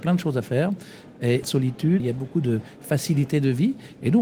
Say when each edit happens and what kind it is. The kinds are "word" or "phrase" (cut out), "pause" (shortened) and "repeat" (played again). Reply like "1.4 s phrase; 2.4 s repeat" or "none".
1.4 s phrase; 2.0 s word